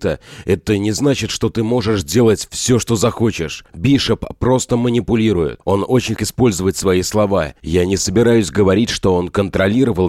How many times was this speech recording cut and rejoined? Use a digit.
1